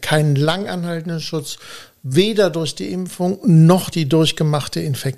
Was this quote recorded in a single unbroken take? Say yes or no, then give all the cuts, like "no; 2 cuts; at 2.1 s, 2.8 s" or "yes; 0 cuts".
no; 1 cut; at 3.9 s